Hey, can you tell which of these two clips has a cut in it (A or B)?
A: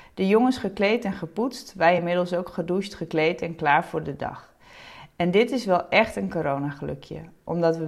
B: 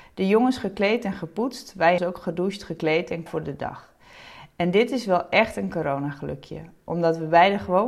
B